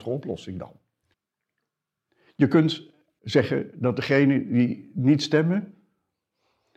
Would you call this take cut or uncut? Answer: cut